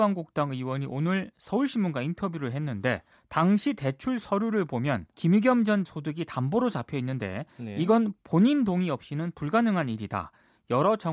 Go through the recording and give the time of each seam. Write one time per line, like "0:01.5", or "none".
0:03.1
0:05.1
0:05.8